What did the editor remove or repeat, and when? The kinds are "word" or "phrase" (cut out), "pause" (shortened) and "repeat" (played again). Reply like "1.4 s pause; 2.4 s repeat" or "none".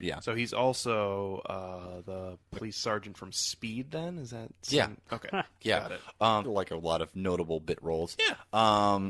2.4 s pause; 6.4 s phrase